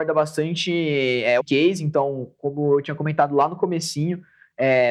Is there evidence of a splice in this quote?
yes; 1 cut; at 1.4 s

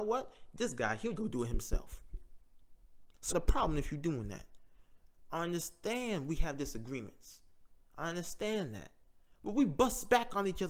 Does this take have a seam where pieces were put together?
yes; 2 cuts; at 1.2 s, 3.3 s

